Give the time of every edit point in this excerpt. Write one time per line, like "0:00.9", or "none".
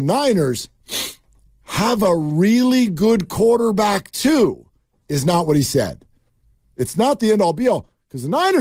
none